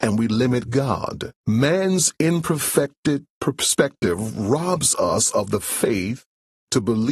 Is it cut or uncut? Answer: cut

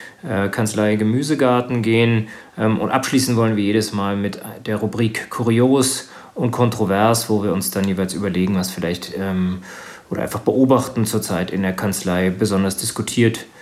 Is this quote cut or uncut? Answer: uncut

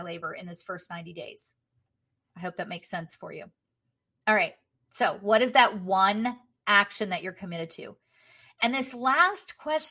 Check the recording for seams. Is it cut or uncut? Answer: uncut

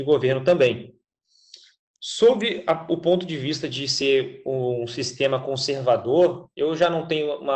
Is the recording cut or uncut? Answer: uncut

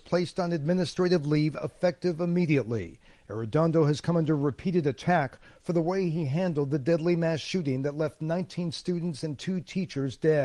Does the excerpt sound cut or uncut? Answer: uncut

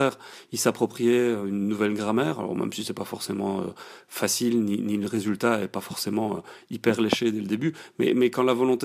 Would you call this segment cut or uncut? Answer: uncut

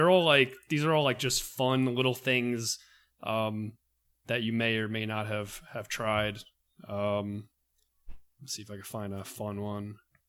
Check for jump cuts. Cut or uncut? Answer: uncut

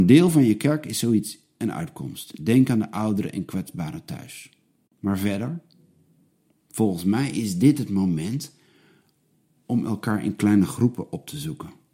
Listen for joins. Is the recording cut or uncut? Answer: uncut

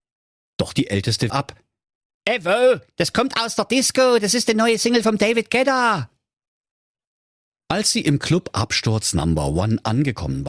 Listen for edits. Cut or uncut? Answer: cut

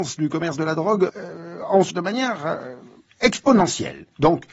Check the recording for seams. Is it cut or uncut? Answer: cut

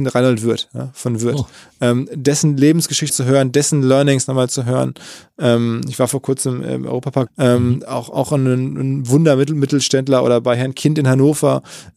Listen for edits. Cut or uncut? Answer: cut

